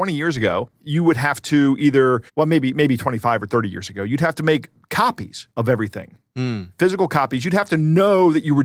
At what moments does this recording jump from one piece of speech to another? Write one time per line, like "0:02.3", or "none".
0:02.3
0:05.5